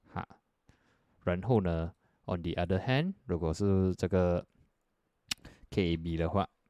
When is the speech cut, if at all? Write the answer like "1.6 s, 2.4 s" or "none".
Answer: none